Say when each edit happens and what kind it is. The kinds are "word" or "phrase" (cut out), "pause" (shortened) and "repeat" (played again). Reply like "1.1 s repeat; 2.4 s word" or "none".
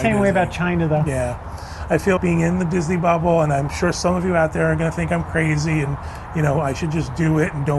2.2 s word